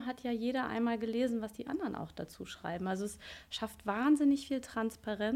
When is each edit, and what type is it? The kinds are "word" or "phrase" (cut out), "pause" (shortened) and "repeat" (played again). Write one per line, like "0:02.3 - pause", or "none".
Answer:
none